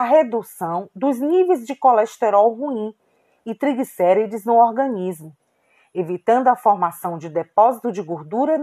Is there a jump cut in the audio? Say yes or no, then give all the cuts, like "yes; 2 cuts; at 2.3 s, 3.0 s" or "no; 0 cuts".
no; 0 cuts